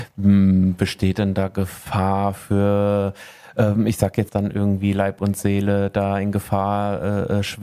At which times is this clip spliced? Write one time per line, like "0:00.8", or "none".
0:04.3